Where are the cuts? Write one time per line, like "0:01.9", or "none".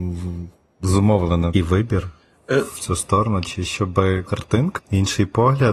0:01.5
0:04.3
0:04.8